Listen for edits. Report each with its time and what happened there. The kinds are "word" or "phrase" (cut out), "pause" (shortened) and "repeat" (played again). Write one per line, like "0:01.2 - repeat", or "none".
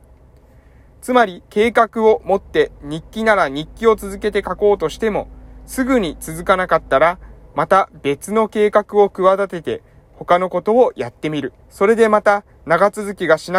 0:01.5 - pause
0:11.6 - pause